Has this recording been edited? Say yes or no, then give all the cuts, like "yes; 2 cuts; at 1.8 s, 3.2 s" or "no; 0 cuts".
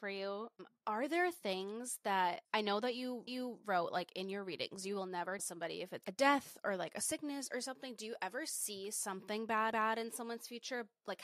yes; 4 cuts; at 3.3 s, 5.4 s, 6.0 s, 9.7 s